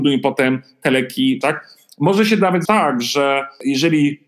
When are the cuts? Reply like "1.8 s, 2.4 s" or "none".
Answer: 1.4 s, 2.7 s